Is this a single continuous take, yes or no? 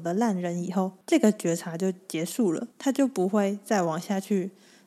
no